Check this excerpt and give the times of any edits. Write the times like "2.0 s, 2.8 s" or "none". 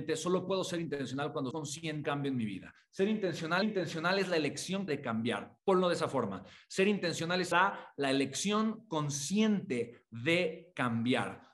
1.5 s, 2.0 s, 3.6 s, 4.9 s, 5.6 s, 7.5 s

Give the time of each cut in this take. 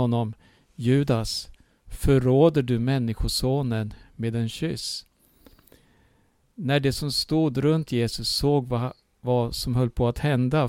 none

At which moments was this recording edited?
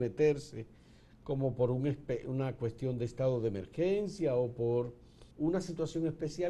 5.3 s

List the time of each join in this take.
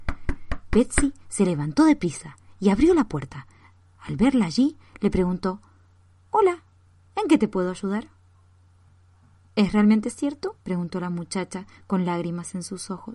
10.6 s

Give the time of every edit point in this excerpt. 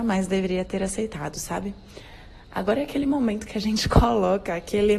none

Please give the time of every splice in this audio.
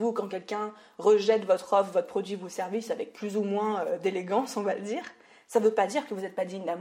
none

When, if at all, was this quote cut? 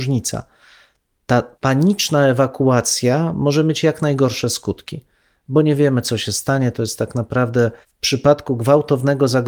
1.5 s, 7.8 s

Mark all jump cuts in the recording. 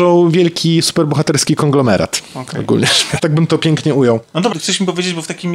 3.2 s, 4.5 s

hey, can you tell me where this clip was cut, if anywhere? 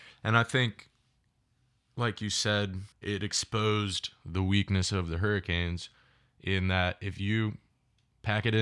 2.9 s

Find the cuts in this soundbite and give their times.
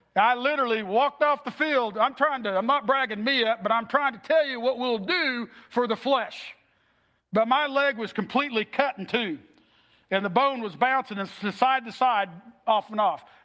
none

